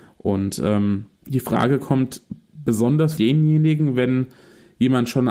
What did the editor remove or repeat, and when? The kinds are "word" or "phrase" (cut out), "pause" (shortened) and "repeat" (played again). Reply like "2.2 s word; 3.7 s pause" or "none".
1.1 s pause; 3.2 s word